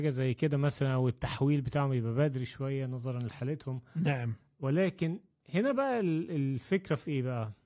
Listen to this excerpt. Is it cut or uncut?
uncut